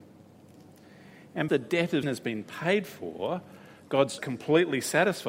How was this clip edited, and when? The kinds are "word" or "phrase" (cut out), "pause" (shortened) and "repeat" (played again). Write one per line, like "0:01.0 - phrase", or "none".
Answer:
0:01.5 - word
0:02.0 - word
0:04.2 - word

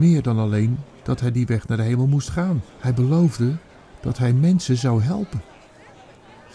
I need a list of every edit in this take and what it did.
0:02.7 - pause

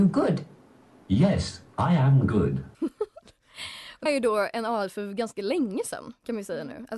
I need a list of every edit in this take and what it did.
0:02.7 - pause
0:04.1 - word

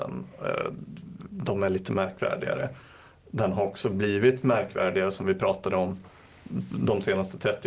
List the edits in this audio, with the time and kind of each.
none

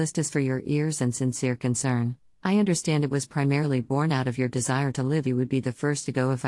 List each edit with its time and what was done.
0:05.2 - word

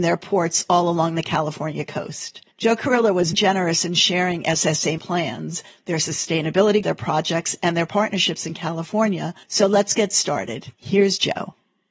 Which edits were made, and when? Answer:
0:02.5 - pause
0:03.3 - word
0:05.0 - word
0:06.8 - word
0:09.4 - pause

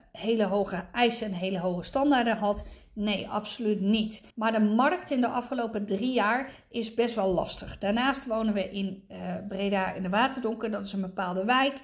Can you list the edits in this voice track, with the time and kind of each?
0:04.3 - pause

